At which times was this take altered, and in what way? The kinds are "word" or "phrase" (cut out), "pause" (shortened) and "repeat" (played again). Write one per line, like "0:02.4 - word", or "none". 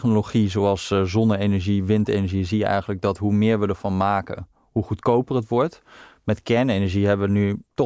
none